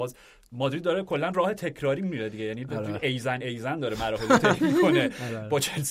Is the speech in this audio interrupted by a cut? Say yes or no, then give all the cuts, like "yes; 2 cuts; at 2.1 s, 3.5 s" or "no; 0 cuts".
no; 0 cuts